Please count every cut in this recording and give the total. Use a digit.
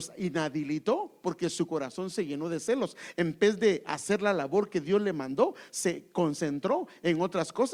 0